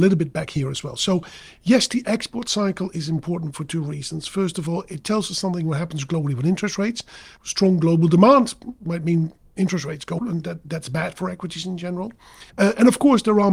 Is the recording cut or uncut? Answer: cut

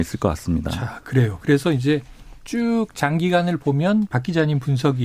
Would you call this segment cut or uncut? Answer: uncut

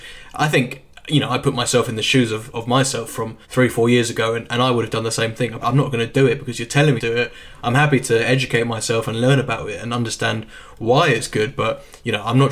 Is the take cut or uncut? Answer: cut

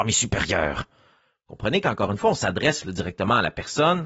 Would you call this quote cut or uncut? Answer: uncut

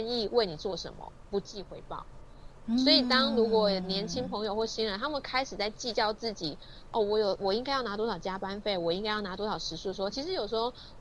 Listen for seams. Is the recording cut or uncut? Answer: uncut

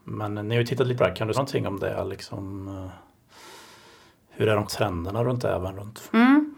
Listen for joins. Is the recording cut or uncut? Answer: cut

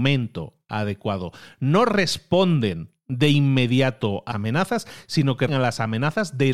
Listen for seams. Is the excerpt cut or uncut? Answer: cut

